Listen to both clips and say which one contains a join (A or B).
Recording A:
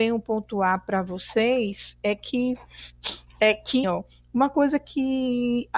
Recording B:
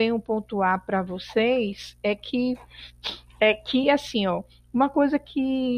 A